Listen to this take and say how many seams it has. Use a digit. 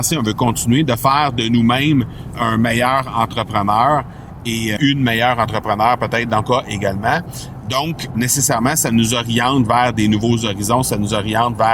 4